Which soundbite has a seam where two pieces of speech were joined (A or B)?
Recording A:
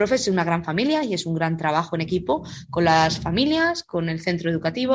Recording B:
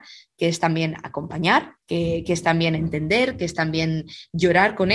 B